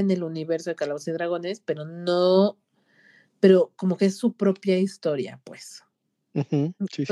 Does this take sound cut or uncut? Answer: uncut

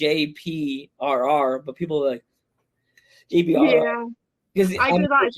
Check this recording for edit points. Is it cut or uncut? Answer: uncut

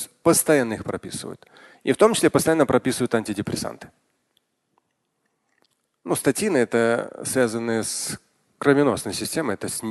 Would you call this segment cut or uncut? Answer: uncut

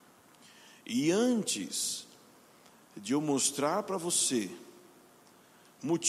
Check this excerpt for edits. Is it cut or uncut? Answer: uncut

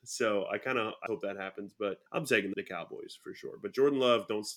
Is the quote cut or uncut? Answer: cut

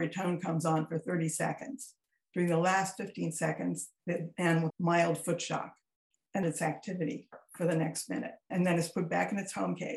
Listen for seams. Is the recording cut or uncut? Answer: cut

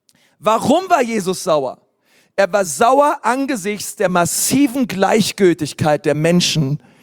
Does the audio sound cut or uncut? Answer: uncut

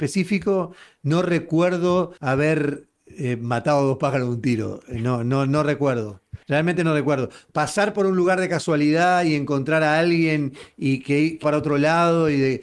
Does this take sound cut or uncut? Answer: cut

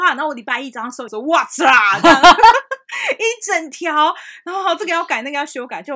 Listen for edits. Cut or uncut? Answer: cut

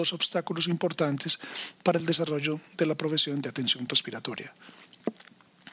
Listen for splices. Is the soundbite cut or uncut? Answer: uncut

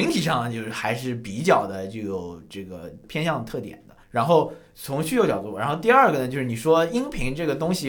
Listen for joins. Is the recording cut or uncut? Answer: cut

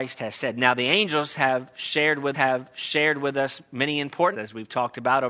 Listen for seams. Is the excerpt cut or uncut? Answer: cut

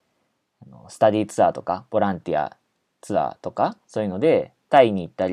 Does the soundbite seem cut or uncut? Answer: cut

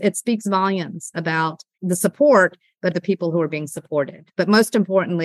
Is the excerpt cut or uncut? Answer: cut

